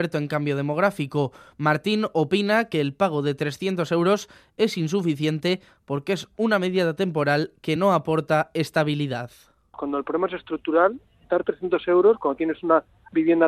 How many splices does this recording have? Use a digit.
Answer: 0